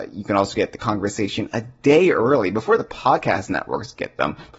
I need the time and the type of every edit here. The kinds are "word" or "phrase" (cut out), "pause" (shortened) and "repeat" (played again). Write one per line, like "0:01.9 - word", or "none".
none